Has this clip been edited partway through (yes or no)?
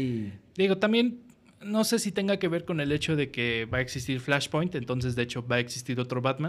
no